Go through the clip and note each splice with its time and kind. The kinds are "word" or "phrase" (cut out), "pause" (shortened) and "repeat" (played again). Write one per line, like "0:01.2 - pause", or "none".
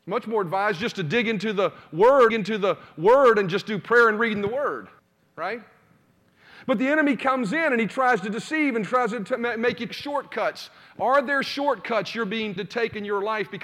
0:02.3 - repeat
0:05.0 - pause
0:09.9 - word
0:12.6 - word